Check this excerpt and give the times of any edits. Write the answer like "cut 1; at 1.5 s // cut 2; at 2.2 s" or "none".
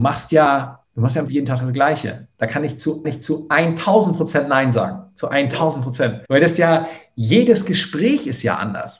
cut 1; at 1.3 s // cut 2; at 3.0 s // cut 3; at 6.3 s

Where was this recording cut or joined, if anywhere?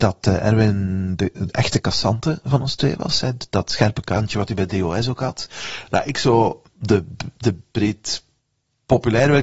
cut 1; at 6.7 s

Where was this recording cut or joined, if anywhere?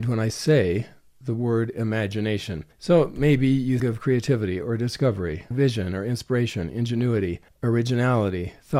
cut 1; at 2.7 s // cut 2; at 3.8 s // cut 3; at 5.5 s // cut 4; at 7.5 s

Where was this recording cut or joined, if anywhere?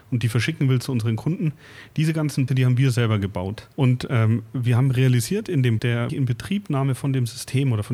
cut 1; at 2.5 s // cut 2; at 3.7 s // cut 3; at 5.8 s // cut 4; at 6.1 s

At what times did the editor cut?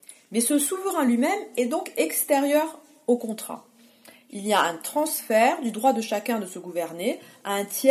none

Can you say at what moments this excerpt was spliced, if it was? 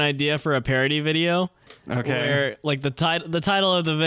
none

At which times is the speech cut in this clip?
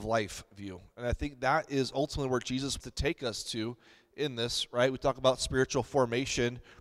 cut 1; at 2.8 s

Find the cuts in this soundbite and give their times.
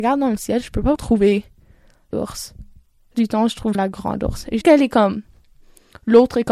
cut 1; at 1.0 s // cut 2; at 2.1 s // cut 3; at 3.1 s // cut 4; at 3.7 s // cut 5; at 4.6 s

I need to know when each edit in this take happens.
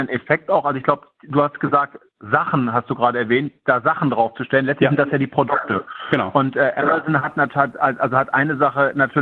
cut 1; at 2.1 s

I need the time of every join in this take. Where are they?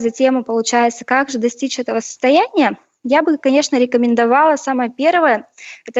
none

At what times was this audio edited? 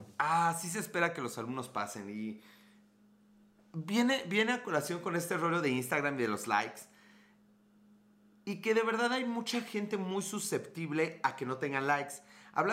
none

